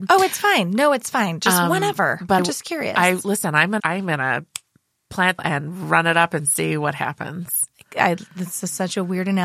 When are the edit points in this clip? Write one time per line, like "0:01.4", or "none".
0:02.4
0:03.8
0:05.4